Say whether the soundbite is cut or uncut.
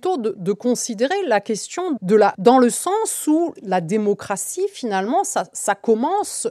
cut